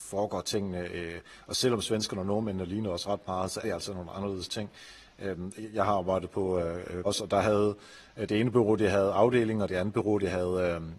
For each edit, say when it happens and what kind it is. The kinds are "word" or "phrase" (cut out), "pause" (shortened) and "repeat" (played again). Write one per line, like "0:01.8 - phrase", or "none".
0:03.6 - word
0:04.1 - word
0:07.0 - word